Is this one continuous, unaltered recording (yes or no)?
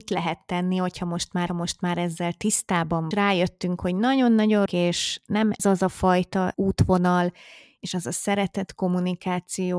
no